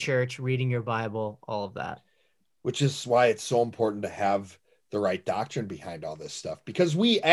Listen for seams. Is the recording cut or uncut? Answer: uncut